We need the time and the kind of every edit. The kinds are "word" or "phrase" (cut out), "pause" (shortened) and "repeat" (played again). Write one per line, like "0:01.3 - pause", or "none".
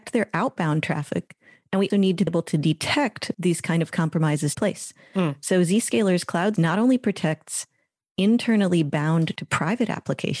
0:01.9 - word
0:02.3 - word
0:03.3 - word
0:04.5 - word
0:06.6 - word
0:09.4 - word